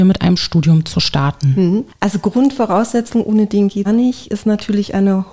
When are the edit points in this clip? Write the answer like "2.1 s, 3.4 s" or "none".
3.8 s